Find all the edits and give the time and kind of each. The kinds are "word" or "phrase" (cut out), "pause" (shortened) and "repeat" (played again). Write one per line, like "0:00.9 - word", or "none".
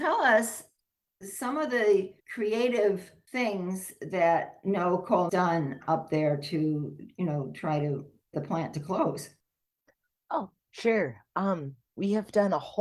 0:02.2 - pause
0:05.3 - phrase
0:08.3 - word